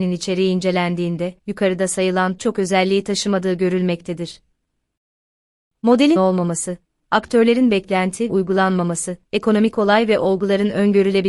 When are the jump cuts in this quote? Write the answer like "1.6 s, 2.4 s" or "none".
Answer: 1.4 s, 2.4 s, 6.2 s, 8.3 s, 9.2 s